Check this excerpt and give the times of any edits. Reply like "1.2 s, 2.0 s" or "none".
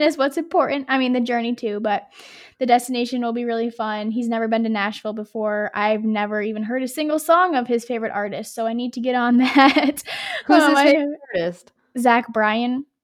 none